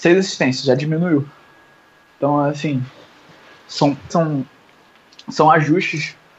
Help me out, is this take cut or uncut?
cut